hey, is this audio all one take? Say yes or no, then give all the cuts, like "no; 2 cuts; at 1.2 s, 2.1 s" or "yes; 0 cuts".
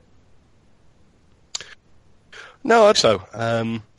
no; 1 cut; at 2.9 s